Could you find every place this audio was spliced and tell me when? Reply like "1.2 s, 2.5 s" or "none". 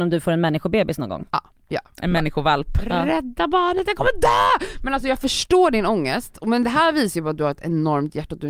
none